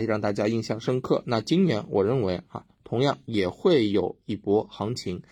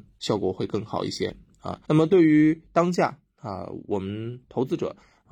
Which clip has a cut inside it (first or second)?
second